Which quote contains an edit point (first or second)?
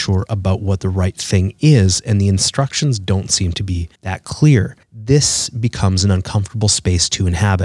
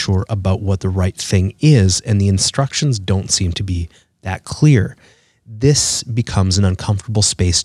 first